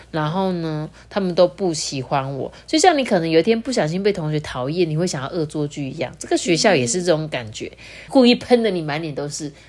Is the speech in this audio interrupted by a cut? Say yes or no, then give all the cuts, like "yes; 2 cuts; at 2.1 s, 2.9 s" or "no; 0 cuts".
yes; 1 cut; at 8.1 s